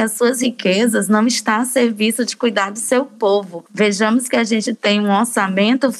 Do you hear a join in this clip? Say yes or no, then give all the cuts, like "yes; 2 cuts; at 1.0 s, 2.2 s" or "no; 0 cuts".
no; 0 cuts